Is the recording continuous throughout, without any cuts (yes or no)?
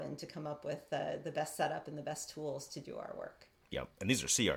yes